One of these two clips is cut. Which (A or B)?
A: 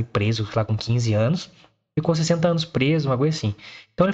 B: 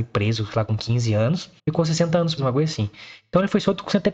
B